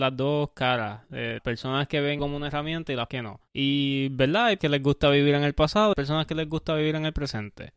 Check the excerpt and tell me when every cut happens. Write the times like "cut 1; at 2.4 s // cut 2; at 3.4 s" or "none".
cut 1; at 1.4 s // cut 2; at 2.2 s // cut 3; at 3.1 s // cut 4; at 3.5 s // cut 5; at 4.6 s // cut 6; at 5.9 s